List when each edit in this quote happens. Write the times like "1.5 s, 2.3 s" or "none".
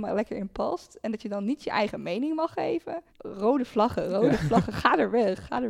3.1 s